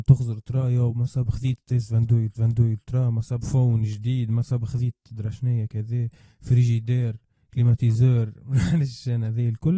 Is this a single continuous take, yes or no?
no